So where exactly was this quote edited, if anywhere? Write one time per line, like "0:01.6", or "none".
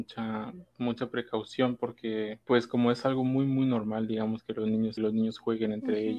0:02.4
0:05.0